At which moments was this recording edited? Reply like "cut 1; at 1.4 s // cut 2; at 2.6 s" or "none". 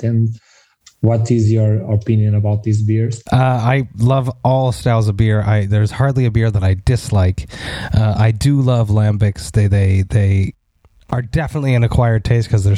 none